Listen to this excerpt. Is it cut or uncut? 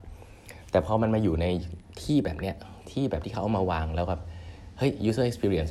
uncut